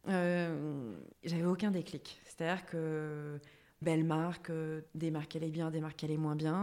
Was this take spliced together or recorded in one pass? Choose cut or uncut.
cut